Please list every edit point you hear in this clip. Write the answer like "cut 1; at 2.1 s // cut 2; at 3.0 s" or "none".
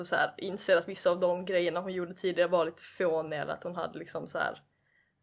none